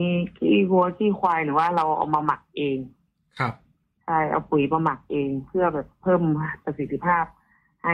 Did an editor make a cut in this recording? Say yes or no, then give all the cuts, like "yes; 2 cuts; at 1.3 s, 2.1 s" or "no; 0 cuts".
no; 0 cuts